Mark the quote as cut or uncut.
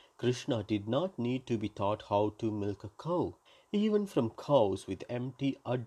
cut